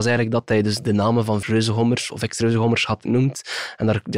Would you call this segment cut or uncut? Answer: cut